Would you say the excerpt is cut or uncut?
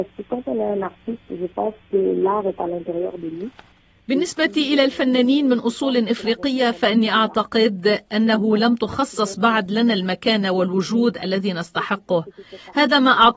uncut